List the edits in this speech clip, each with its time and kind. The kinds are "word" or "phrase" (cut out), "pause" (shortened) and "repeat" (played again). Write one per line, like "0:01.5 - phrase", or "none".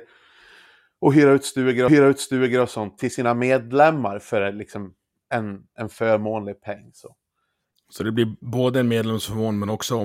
0:01.9 - repeat